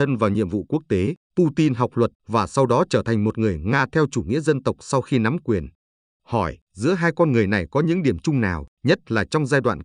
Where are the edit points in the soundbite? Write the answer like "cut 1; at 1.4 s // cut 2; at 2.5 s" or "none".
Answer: cut 1; at 1.2 s // cut 2; at 2.2 s // cut 3; at 6.6 s // cut 4; at 8.7 s